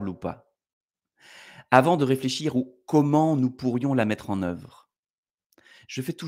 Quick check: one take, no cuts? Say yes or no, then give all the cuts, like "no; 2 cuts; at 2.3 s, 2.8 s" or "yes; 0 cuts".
yes; 0 cuts